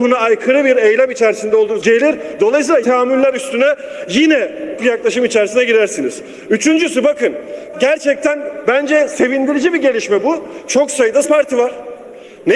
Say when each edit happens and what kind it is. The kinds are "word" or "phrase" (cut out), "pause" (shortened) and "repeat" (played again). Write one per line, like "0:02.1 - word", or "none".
0:01.8 - word
0:02.8 - word
0:04.8 - word
0:07.7 - word
0:11.2 - word